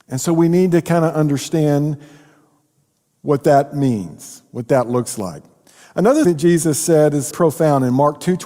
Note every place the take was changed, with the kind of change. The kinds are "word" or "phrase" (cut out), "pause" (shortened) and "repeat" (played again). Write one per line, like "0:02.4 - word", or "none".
0:06.2 - word
0:07.3 - word

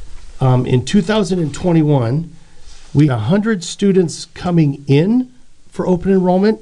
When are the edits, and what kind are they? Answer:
0:03.1 - word

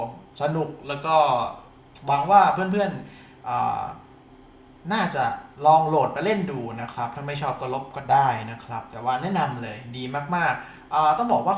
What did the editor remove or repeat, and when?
none

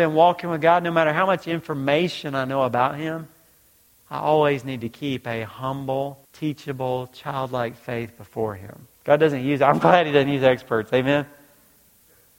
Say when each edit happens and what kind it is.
0:06.2 - pause
0:09.0 - pause

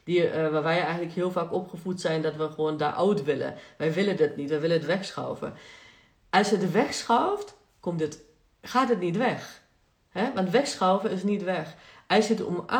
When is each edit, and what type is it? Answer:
none

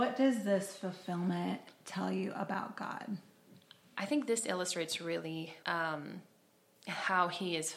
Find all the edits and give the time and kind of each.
0:03.6 - pause
0:05.6 - word

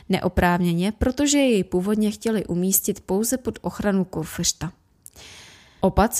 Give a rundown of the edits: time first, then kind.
none

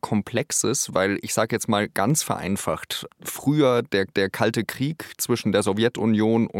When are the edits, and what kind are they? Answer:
0:03.1 - word
0:04.1 - repeat

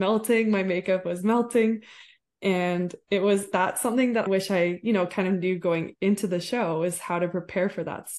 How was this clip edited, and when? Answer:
0:03.5 - word
0:04.3 - word
0:05.9 - word

